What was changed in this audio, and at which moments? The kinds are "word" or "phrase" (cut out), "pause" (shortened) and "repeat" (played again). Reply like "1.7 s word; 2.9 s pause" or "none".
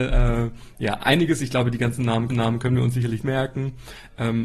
2.3 s repeat; 3.2 s word